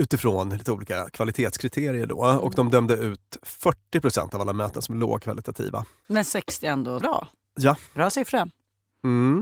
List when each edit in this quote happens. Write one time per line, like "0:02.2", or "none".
0:07.0
0:07.9